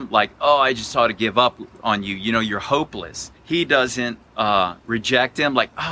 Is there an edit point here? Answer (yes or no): yes